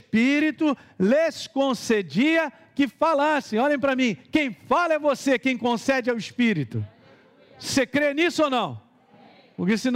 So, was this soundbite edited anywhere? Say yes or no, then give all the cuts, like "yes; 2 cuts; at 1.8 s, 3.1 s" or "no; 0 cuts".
no; 0 cuts